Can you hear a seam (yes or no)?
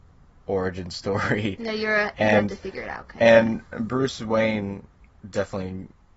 no